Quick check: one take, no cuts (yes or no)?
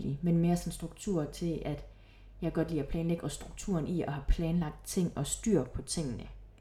yes